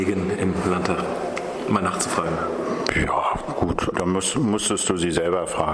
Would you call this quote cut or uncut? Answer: cut